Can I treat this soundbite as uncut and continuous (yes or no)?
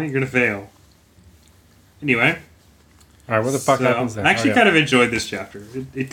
yes